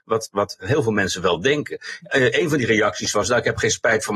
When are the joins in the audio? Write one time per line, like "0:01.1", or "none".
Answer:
none